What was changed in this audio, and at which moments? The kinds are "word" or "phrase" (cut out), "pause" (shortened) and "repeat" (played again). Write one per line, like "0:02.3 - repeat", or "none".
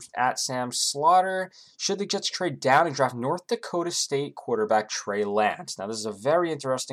none